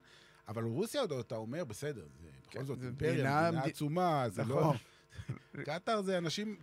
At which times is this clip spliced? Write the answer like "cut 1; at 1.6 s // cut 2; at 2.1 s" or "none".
none